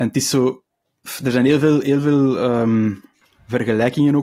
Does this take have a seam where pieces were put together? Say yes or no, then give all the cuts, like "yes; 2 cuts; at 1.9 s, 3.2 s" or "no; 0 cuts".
no; 0 cuts